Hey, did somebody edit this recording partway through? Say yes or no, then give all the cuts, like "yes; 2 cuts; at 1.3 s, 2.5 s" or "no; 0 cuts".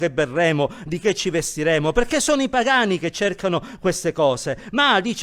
no; 0 cuts